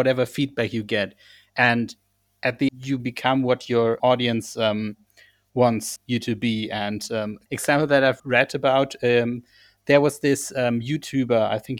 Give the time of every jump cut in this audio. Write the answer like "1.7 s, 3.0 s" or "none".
2.7 s, 3.0 s, 4.0 s, 6.0 s, 7.5 s, 8.2 s